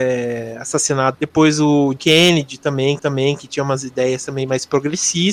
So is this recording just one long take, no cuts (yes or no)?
no